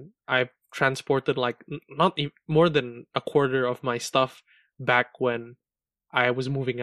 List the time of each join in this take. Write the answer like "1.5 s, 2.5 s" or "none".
none